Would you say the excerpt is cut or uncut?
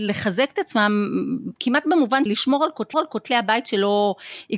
cut